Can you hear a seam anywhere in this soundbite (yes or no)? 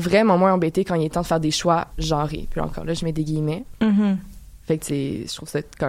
yes